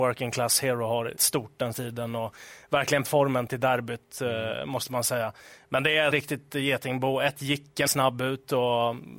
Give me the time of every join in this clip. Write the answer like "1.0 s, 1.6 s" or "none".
1.2 s, 1.7 s, 3.0 s, 3.5 s, 6.1 s, 7.9 s